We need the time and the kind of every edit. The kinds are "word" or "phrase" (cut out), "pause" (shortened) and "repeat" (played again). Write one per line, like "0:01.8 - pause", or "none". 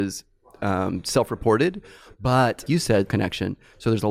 0:02.7 - word
0:03.1 - word